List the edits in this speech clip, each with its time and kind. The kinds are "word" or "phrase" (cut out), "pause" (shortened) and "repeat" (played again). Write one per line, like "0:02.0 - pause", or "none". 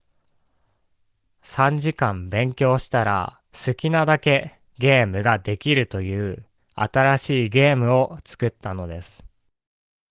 0:03.5 - pause
0:04.7 - pause
0:06.6 - pause